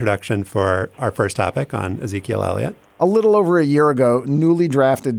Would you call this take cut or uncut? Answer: uncut